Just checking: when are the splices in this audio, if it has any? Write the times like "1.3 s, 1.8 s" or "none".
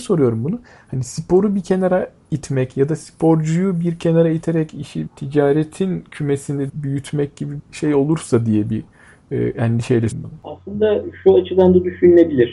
5.1 s, 6.7 s, 7.6 s, 10.1 s

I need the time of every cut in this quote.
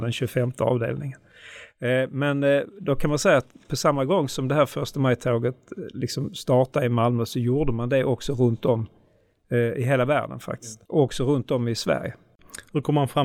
10.9 s

